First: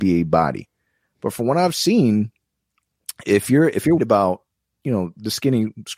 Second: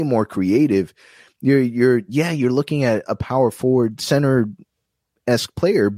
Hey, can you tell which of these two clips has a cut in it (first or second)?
first